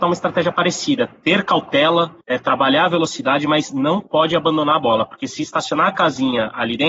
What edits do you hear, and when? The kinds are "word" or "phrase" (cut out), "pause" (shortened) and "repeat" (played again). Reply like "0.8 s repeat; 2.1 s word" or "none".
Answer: 2.2 s pause

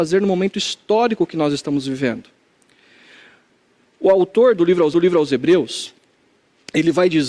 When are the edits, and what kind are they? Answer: 4.9 s repeat

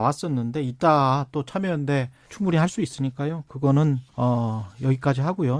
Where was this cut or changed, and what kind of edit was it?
2.3 s word; 4.1 s pause

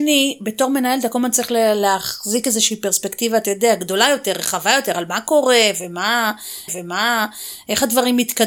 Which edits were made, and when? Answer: 6.7 s repeat

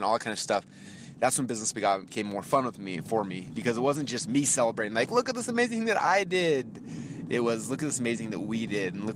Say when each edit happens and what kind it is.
none

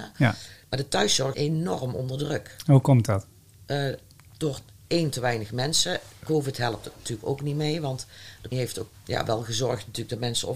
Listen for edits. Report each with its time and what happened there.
1.3 s word; 8.5 s word; 8.9 s word

